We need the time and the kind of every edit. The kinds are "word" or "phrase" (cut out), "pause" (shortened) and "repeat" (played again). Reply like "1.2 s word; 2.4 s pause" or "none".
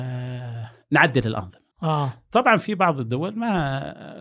1.7 s pause